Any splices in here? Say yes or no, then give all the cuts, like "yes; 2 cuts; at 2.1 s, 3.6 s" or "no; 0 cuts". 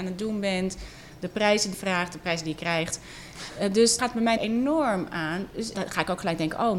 yes; 4 cuts; at 1.7 s, 4.0 s, 4.4 s, 5.7 s